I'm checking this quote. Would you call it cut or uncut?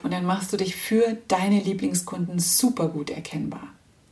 uncut